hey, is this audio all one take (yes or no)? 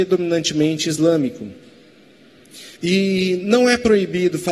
no